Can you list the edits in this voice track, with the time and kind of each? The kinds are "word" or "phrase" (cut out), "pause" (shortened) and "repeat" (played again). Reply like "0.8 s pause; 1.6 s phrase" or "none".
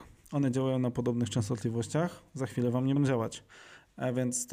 3.0 s word